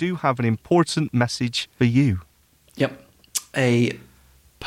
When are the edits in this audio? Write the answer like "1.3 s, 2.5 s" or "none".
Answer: 1.8 s